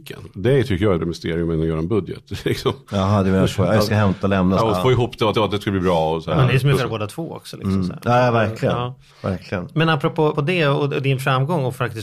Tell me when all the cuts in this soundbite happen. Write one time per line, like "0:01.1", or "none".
0:01.0
0:03.9
0:04.6
0:05.3
0:06.8
0:09.1
0:10.3